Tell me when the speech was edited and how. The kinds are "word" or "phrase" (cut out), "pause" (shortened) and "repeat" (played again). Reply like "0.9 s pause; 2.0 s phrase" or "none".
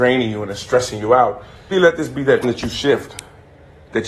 1.7 s word; 2.4 s word